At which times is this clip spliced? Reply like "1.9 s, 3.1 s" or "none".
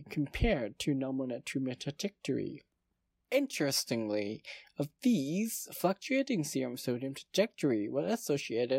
none